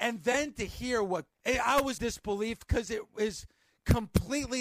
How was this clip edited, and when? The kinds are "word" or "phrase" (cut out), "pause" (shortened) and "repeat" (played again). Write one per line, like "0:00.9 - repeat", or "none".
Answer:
0:01.3 - phrase
0:02.0 - word